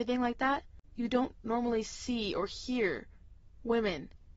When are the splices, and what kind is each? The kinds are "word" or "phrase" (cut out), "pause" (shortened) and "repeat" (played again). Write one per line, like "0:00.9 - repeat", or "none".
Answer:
none